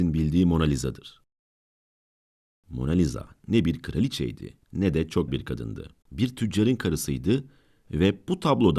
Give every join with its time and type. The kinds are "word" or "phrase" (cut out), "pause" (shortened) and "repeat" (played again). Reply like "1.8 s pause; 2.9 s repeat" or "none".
4.6 s pause; 5.3 s word; 6.0 s pause